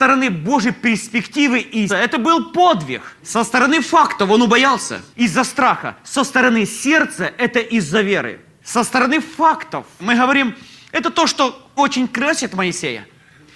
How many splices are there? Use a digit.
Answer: 3